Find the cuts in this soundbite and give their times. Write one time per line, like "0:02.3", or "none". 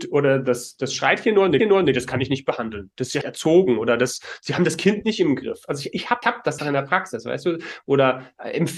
0:01.6
0:03.2
0:06.2
0:06.6